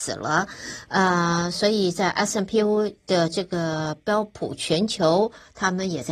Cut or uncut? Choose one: uncut